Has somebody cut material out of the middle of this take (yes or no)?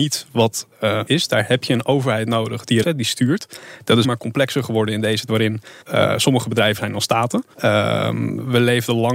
yes